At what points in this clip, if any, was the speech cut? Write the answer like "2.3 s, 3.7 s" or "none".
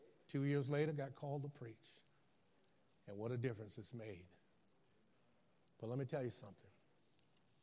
none